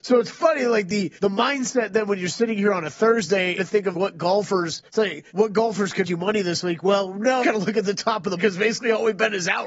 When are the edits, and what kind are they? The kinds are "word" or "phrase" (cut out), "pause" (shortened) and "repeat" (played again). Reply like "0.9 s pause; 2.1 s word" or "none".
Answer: 1.2 s pause; 3.6 s phrase; 3.9 s word; 4.9 s pause; 5.3 s pause; 6.0 s word; 7.4 s phrase; 8.4 s word